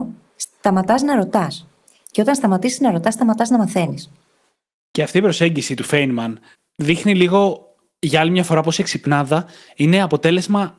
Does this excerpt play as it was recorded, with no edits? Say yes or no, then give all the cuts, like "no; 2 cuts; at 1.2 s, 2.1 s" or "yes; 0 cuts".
yes; 0 cuts